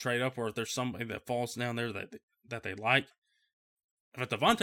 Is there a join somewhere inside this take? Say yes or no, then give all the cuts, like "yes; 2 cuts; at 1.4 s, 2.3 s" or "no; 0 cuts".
no; 0 cuts